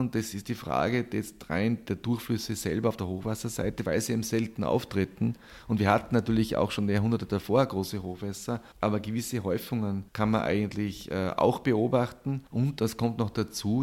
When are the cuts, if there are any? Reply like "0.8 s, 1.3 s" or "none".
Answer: 8.7 s, 10.1 s, 12.5 s